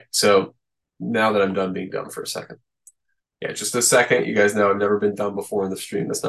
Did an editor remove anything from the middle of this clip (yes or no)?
no